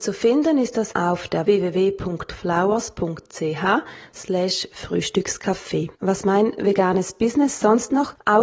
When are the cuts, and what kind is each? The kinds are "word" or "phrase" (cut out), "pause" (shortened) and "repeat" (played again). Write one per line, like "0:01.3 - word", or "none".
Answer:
0:00.9 - word
0:01.4 - word
0:05.9 - pause